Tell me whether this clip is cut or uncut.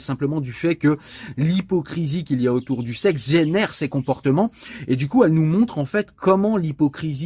uncut